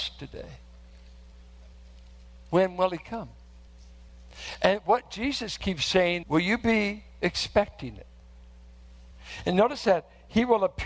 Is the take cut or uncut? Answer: cut